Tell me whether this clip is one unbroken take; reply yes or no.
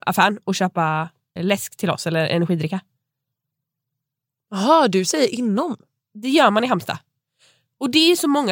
no